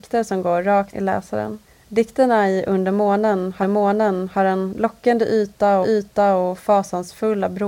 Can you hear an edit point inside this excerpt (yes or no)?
yes